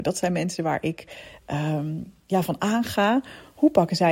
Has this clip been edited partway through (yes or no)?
no